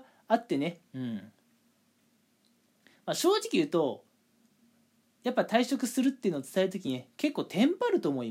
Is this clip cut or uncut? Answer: uncut